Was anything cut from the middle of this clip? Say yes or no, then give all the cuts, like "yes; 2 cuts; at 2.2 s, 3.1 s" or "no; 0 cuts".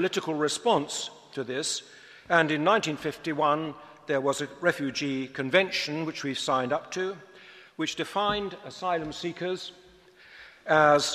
no; 0 cuts